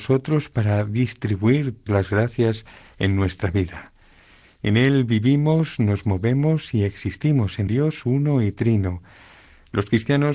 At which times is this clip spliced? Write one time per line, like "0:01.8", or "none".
0:01.9
0:07.7